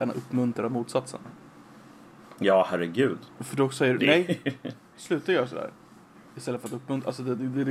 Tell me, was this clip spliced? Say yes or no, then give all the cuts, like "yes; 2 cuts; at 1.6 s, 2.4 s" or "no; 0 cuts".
no; 0 cuts